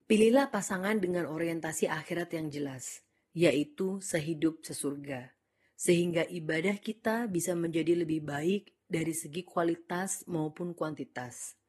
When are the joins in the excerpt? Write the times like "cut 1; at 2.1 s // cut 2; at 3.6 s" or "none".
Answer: none